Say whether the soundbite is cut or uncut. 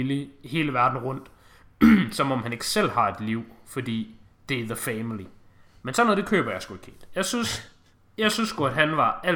uncut